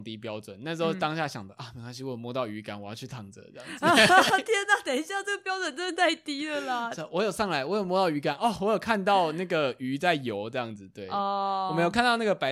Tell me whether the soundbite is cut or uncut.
uncut